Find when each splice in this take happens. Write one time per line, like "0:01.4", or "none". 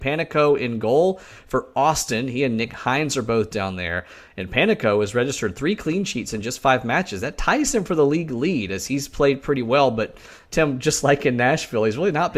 none